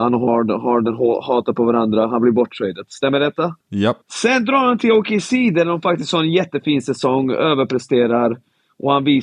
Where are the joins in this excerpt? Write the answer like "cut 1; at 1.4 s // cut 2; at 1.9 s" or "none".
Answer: cut 1; at 3.6 s // cut 2; at 4.0 s